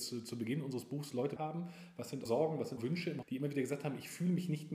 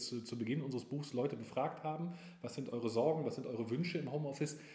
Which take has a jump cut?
first; 4 cuts; at 1.4 s, 2.3 s, 2.8 s, 3.2 s

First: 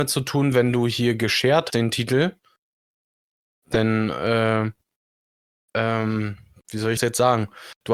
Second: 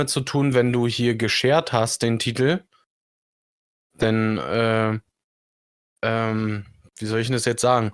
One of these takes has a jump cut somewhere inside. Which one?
first; 2 cuts; at 1.7 s, 7.0 s

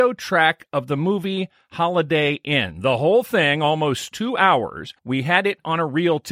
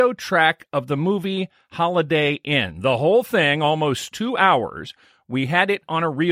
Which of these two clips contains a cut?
first; 1 cut; at 5.0 s

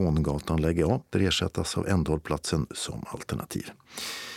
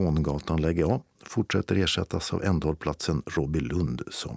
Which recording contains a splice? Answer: first; 2 cuts; at 1.1 s, 2.7 s

